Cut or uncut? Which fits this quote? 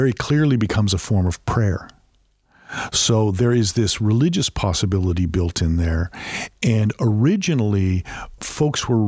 uncut